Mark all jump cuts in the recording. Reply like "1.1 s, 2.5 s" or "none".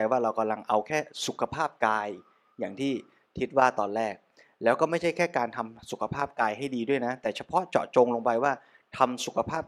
none